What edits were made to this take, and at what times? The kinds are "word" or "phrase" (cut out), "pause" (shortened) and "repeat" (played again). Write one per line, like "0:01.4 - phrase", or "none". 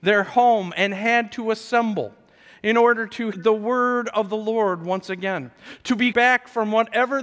0:03.3 - word
0:06.1 - word